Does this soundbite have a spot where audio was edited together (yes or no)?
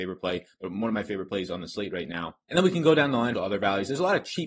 yes